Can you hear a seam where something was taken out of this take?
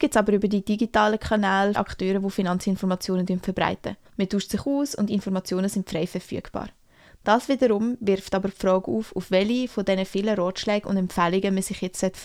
yes; 2 cuts; at 1.7 s, 4.0 s

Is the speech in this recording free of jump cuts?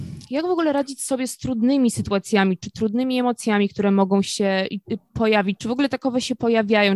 yes; 0 cuts

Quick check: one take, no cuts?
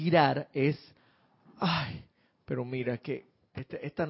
yes; 0 cuts

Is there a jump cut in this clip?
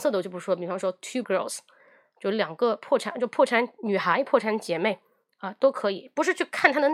yes; 1 cut; at 1.2 s

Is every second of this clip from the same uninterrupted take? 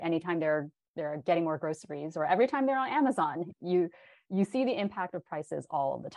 yes; 0 cuts

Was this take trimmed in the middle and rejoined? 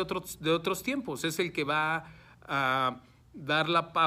no; 0 cuts

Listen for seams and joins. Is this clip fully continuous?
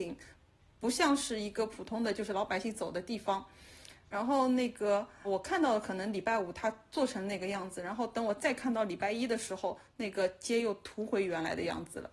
no; 1 cut; at 5.2 s

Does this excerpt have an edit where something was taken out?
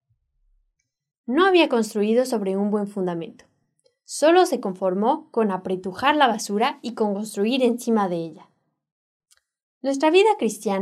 no; 0 cuts

